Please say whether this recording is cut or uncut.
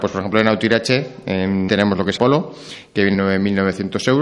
cut